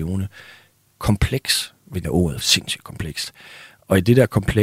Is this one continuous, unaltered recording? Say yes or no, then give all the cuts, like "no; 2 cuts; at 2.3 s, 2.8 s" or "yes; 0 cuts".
no; 2 cuts; at 2.0 s, 2.4 s